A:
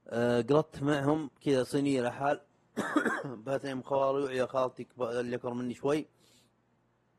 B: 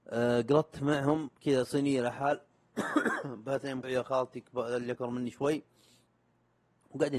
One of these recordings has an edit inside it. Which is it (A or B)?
B